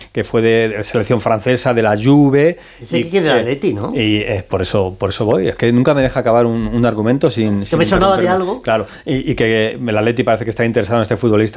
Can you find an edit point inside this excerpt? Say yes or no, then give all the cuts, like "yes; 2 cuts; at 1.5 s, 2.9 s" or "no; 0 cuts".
no; 0 cuts